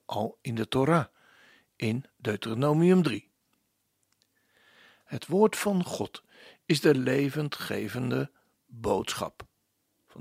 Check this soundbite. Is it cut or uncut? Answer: uncut